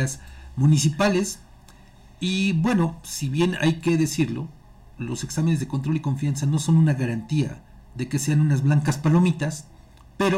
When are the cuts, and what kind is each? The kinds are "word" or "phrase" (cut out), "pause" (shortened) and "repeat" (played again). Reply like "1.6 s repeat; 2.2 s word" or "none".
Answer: none